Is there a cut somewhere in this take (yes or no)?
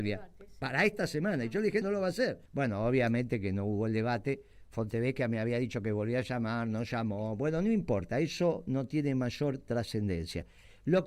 yes